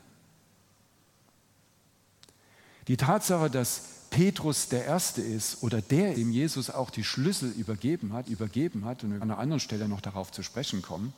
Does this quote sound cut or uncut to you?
cut